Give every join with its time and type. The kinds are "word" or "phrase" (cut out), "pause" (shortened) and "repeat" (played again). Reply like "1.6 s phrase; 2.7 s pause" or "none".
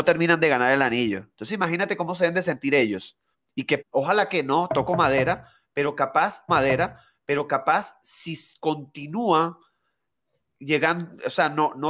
3.3 s pause; 3.8 s word; 6.5 s repeat